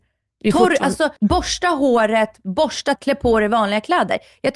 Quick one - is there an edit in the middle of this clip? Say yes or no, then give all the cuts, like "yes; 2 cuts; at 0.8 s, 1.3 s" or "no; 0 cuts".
yes; 2 cuts; at 1.2 s, 3.0 s